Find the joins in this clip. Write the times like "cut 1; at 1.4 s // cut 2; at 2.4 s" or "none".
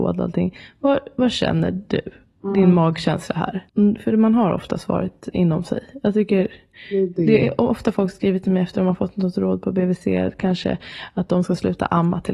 cut 1; at 3.7 s